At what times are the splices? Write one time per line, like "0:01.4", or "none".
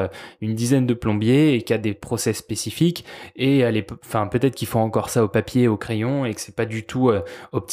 none